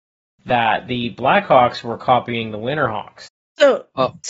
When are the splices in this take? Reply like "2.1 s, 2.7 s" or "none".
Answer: 3.3 s